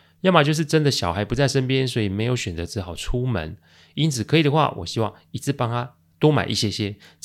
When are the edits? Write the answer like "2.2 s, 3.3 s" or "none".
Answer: none